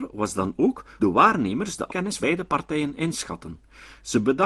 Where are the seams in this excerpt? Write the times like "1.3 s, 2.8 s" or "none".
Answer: 1.0 s, 1.9 s, 2.2 s